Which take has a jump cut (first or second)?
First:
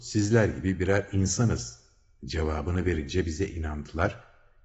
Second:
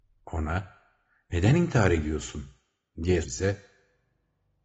second